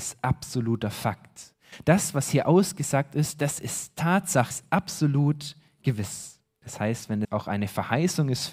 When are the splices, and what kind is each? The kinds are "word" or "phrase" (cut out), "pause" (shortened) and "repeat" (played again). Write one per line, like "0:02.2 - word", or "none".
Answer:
0:04.5 - word
0:06.6 - pause
0:07.2 - word